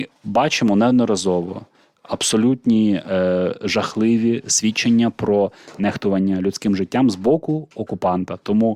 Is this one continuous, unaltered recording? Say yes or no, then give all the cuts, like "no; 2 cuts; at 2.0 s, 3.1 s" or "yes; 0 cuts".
yes; 0 cuts